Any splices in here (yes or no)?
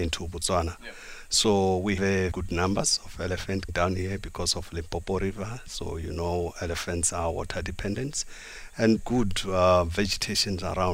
yes